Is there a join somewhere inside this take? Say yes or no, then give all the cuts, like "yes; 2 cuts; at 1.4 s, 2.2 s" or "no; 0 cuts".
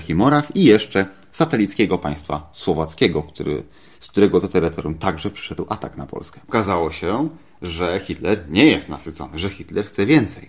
no; 0 cuts